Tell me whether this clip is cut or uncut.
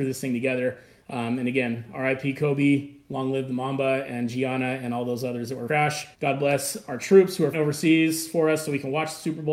cut